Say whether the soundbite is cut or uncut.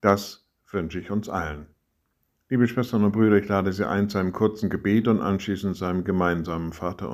uncut